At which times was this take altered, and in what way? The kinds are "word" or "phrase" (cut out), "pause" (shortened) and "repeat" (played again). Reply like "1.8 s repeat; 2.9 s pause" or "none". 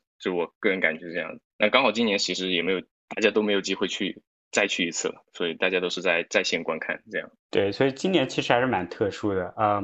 1.5 s pause; 3.0 s pause; 7.4 s pause

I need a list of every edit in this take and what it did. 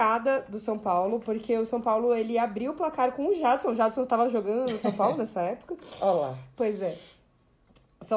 none

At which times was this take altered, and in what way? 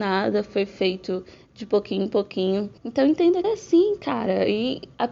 2.8 s pause; 3.4 s phrase

